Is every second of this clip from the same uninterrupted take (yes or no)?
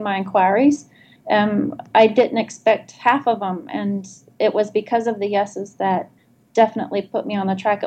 yes